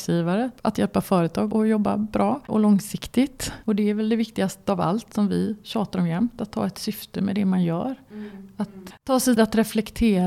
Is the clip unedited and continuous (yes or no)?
no